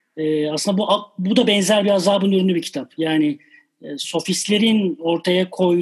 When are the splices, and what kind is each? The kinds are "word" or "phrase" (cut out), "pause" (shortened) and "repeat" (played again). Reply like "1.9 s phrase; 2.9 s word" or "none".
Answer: none